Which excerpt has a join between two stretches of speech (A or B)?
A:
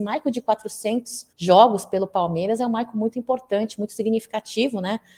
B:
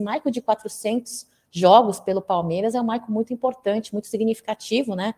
A